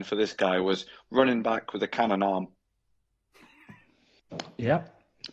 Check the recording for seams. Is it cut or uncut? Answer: uncut